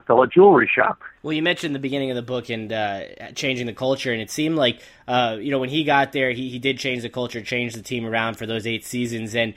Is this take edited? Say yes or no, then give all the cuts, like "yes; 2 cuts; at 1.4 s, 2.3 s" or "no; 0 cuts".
yes; 1 cut; at 1.2 s